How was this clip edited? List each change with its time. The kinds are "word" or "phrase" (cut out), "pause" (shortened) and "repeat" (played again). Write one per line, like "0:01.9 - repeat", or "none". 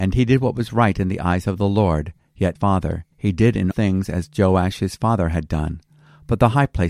0:02.6 - phrase
0:03.1 - pause
0:03.7 - word